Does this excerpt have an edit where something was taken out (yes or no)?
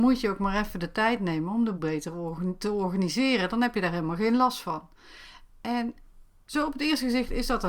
yes